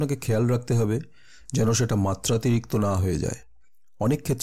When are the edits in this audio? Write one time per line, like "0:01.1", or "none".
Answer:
none